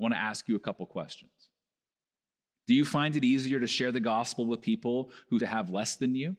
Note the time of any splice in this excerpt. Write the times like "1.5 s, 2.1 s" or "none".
5.4 s

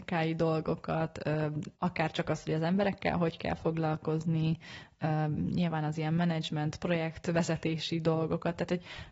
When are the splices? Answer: 1.8 s

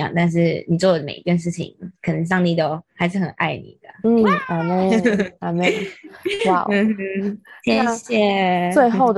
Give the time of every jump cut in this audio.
none

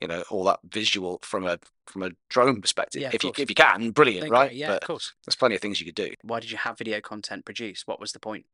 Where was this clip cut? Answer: none

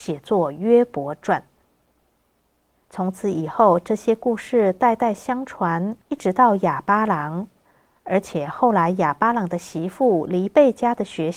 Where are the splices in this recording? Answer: 6.0 s

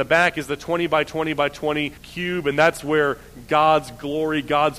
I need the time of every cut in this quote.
2.0 s

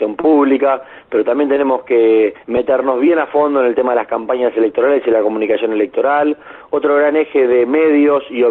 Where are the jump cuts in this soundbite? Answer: 2.4 s

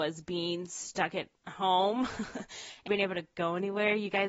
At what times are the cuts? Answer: 2.9 s

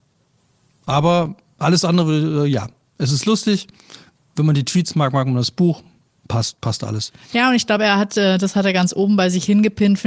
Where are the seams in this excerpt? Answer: none

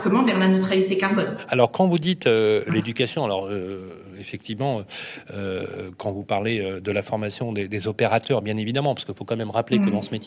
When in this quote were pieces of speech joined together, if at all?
none

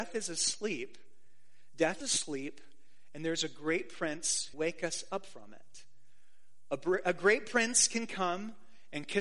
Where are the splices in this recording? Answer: 2.0 s, 4.5 s

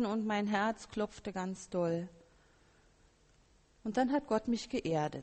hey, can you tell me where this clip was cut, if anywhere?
none

